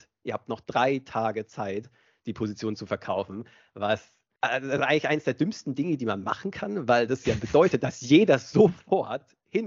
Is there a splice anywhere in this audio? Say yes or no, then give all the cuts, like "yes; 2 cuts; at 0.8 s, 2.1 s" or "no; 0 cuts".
no; 0 cuts